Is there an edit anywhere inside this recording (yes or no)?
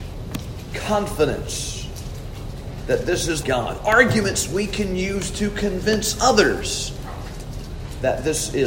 yes